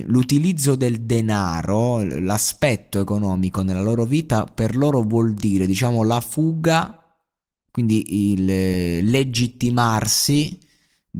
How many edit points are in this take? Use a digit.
0